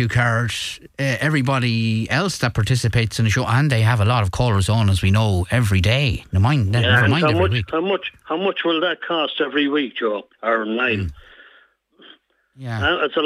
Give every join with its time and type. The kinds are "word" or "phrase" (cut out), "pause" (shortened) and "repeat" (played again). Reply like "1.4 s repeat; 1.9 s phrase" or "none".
10.3 s pause